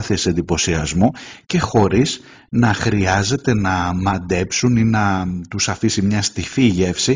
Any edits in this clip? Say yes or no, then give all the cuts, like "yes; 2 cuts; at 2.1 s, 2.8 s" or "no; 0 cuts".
no; 0 cuts